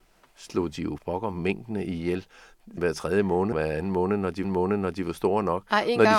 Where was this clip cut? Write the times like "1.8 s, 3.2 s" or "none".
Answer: 1.0 s, 2.8 s, 3.5 s, 4.4 s